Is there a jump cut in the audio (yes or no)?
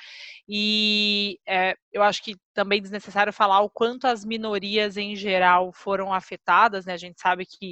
yes